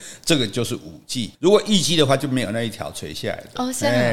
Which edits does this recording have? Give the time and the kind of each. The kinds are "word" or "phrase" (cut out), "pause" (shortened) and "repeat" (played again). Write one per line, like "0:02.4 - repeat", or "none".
0:01.3 - pause

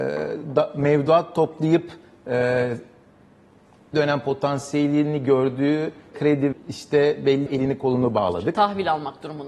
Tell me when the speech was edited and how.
0:03.9 - word
0:06.1 - word
0:06.5 - word
0:07.5 - word

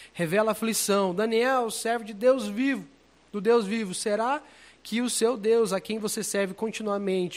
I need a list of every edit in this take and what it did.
none

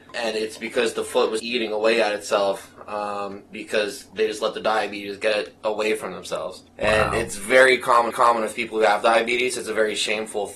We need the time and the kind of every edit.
0:01.4 - word
0:06.7 - pause
0:08.1 - repeat

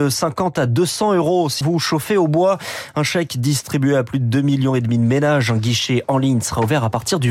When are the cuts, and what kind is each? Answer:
0:01.6 - word

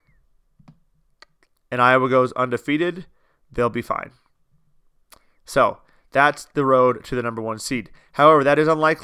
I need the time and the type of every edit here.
none

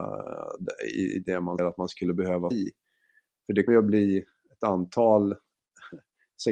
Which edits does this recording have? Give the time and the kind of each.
0:01.6 - word
0:02.5 - word
0:03.7 - word

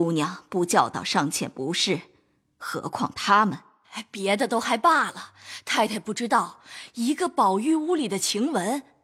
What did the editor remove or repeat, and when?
none

